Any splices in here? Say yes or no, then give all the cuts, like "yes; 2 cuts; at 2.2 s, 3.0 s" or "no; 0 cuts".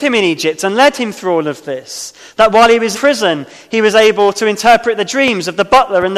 yes; 1 cut; at 2.9 s